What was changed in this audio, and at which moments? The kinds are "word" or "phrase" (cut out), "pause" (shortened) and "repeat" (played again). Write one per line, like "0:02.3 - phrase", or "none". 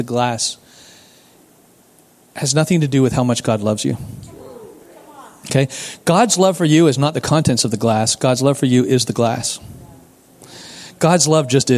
none

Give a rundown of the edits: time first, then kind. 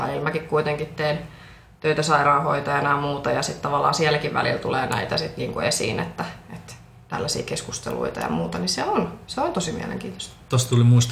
none

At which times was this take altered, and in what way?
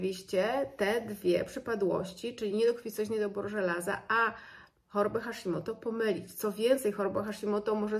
none

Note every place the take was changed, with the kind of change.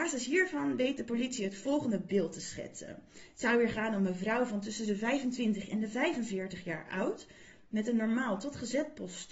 none

